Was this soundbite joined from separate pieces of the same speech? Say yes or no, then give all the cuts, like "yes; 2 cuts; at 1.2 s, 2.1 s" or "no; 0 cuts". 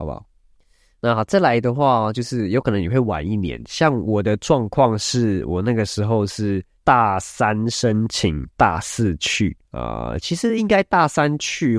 yes; 1 cut; at 9.7 s